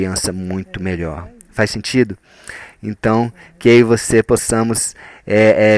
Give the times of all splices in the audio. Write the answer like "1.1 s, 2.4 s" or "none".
none